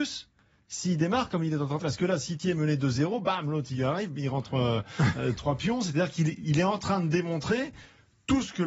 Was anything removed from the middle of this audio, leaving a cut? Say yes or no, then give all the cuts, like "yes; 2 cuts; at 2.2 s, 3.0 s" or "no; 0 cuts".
yes; 2 cuts; at 1.8 s, 5.4 s